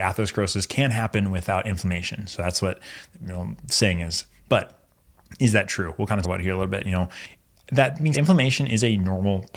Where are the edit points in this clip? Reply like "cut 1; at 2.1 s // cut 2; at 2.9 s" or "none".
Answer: cut 1; at 3.1 s // cut 2; at 6.2 s // cut 3; at 8.1 s